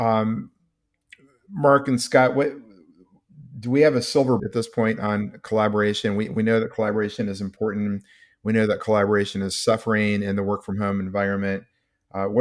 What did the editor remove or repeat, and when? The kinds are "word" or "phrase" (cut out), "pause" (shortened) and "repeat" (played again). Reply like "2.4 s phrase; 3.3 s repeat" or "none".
4.4 s word